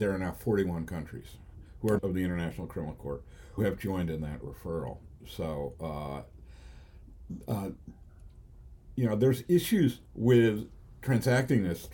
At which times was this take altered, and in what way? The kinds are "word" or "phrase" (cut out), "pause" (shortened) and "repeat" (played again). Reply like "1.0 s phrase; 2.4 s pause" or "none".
2.0 s word; 3.6 s word